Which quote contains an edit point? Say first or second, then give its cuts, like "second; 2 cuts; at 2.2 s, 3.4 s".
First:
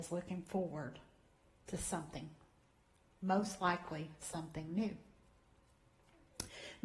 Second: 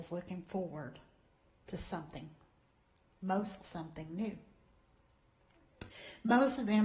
second; 1 cut; at 3.6 s